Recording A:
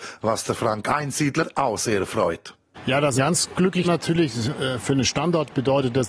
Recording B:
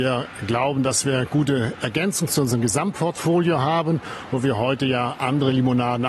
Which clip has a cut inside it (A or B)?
A